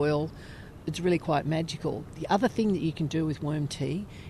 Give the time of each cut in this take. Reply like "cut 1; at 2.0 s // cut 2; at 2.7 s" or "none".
none